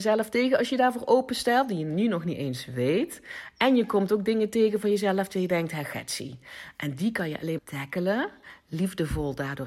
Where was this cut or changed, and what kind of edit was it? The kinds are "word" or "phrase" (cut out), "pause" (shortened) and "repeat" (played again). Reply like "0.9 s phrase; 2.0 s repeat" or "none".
7.6 s word